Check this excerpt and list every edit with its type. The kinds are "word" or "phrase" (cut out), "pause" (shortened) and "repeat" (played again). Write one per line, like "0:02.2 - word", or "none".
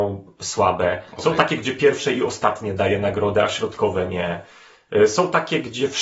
none